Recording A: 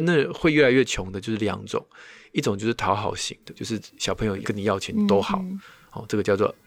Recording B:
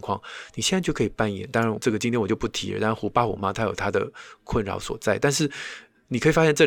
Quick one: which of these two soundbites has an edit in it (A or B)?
A